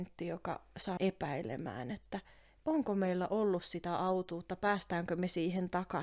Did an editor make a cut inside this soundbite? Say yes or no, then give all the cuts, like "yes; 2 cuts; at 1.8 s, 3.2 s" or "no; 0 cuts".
yes; 1 cut; at 1.0 s